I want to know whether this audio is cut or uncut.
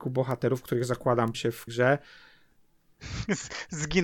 cut